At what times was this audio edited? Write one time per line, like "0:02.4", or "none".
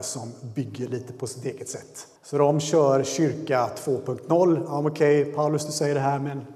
0:02.2